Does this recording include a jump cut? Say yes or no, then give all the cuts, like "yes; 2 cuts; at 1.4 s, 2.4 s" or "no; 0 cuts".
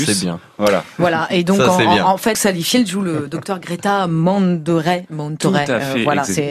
yes; 1 cut; at 2.3 s